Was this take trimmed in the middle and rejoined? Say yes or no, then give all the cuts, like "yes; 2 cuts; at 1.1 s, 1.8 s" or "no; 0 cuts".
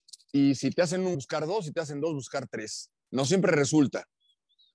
yes; 1 cut; at 1.1 s